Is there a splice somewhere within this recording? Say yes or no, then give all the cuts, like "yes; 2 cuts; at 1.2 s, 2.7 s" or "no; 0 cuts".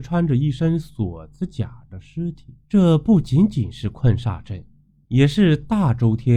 yes; 1 cut; at 2.6 s